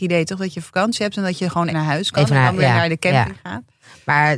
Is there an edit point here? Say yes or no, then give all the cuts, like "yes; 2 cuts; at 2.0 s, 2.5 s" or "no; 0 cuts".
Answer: yes; 1 cut; at 1.7 s